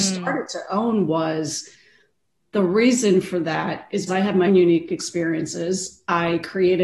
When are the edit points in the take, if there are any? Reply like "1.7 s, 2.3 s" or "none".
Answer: 4.1 s, 4.5 s